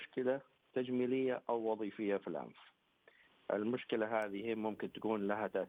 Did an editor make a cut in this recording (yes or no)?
no